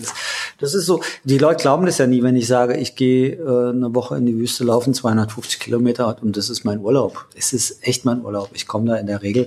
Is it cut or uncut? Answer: uncut